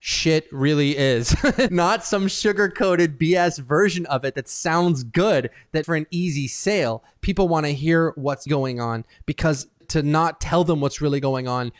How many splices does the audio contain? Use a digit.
4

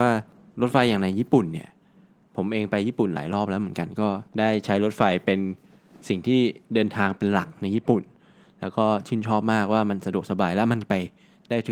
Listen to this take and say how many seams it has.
1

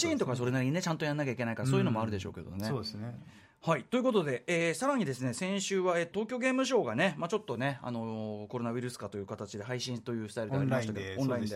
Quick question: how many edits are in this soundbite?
1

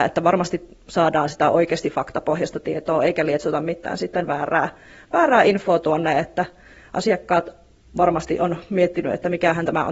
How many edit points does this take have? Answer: 0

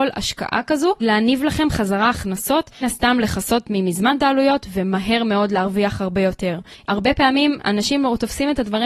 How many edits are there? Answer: 2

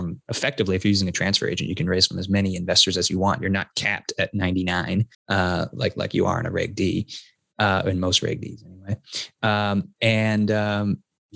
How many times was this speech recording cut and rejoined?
1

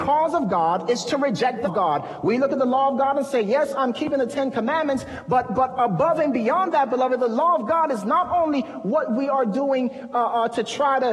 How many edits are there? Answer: 1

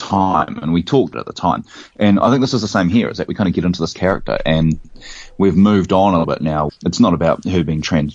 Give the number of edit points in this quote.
3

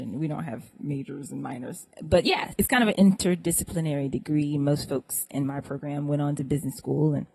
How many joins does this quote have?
0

